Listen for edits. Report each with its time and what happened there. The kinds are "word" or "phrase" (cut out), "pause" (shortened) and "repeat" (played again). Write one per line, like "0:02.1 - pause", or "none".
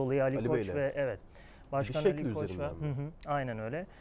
none